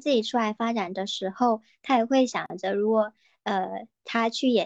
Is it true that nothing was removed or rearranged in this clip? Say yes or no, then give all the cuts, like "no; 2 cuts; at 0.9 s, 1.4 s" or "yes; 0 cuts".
yes; 0 cuts